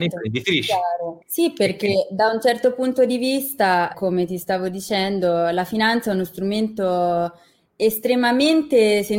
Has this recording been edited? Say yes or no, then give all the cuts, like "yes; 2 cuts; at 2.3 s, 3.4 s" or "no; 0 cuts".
yes; 2 cuts; at 1.2 s, 3.9 s